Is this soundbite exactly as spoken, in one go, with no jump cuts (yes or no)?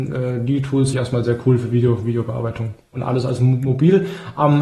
no